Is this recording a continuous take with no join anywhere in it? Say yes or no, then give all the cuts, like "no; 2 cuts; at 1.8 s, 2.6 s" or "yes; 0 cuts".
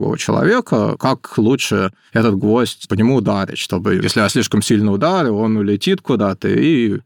yes; 0 cuts